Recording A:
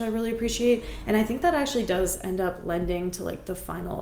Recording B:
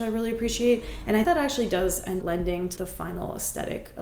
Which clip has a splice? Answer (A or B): B